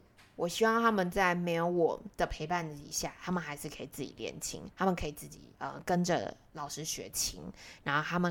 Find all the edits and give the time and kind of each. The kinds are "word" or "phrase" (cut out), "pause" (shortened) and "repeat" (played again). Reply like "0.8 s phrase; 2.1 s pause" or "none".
2.1 s pause; 4.7 s pause; 5.5 s pause